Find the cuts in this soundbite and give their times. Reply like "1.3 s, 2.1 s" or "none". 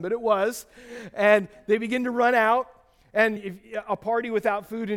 3.4 s